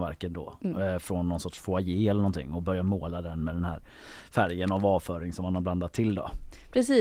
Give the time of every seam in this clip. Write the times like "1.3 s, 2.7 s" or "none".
none